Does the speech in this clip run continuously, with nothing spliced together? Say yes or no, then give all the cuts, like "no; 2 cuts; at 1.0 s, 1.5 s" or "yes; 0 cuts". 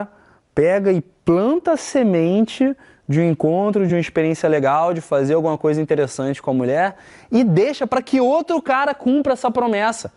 yes; 0 cuts